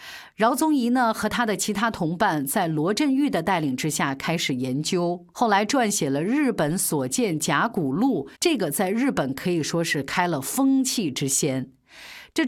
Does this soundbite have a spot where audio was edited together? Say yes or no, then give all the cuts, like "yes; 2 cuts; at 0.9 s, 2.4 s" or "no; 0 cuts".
yes; 1 cut; at 8.3 s